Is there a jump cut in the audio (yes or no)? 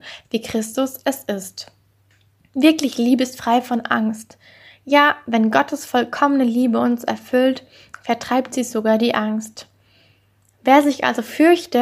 no